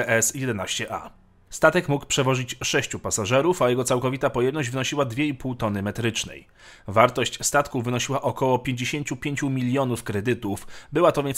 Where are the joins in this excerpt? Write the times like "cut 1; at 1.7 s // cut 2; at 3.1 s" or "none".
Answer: none